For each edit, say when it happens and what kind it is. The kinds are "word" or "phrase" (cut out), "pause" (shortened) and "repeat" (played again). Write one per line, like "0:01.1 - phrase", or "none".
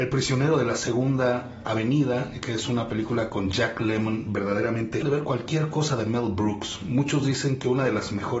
0:05.0 - phrase